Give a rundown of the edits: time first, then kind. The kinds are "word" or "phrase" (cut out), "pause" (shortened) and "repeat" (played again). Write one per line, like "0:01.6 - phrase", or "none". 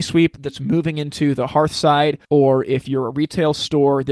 0:02.2 - pause